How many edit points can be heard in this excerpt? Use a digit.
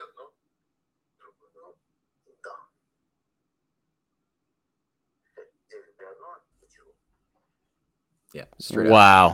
3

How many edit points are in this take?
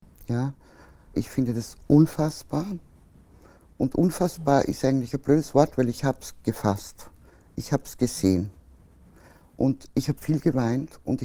1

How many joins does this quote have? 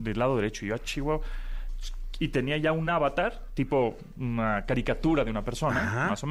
0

